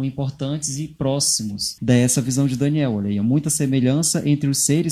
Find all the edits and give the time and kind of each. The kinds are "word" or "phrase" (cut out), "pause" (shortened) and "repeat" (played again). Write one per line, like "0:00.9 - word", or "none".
0:01.8 - word